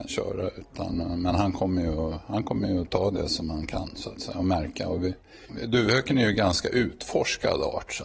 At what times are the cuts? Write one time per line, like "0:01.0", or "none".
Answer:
none